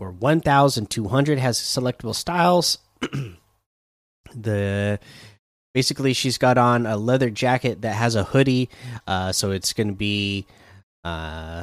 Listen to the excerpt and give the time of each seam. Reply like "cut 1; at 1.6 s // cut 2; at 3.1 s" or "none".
none